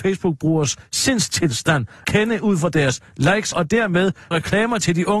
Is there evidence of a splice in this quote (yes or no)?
yes